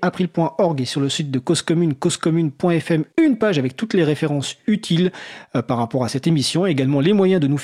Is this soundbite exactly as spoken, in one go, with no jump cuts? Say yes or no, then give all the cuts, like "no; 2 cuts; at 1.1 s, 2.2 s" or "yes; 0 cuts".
no; 1 cut; at 3.1 s